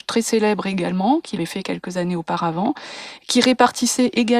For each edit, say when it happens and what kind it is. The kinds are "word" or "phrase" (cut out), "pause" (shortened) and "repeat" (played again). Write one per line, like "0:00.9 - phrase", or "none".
0:01.4 - word